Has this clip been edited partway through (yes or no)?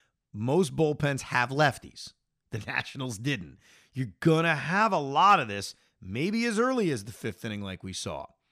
no